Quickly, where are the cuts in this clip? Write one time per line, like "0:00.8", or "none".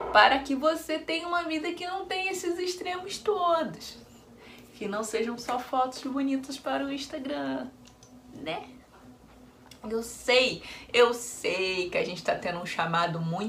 none